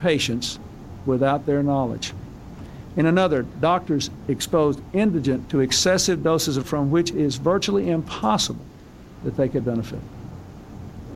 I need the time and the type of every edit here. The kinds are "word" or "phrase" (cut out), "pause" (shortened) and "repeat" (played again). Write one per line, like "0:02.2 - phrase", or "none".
0:05.5 - phrase
0:06.6 - phrase
0:07.1 - word
0:09.6 - word